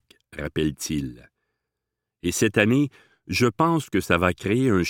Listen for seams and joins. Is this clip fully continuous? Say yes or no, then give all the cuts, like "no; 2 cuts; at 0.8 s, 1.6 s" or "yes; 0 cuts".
yes; 0 cuts